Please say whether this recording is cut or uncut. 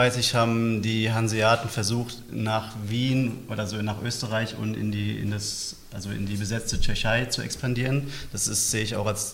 uncut